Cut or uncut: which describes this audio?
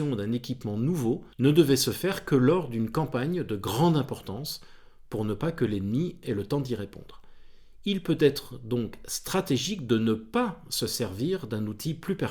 cut